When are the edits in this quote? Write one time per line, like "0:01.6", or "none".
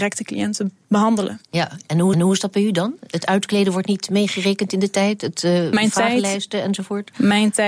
0:02.1